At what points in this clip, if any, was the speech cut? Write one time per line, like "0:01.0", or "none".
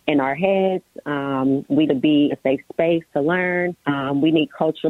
0:01.9
0:02.3
0:03.8